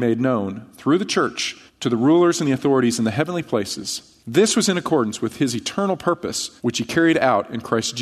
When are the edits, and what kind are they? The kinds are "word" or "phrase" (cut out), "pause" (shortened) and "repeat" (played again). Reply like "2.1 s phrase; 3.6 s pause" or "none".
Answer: 1.7 s pause; 4.2 s pause; 6.6 s pause